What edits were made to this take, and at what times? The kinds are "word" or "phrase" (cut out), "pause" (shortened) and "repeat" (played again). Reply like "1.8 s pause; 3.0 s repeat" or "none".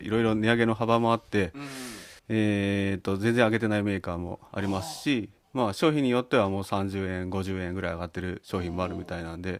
2.2 s pause; 4.5 s pause; 5.4 s pause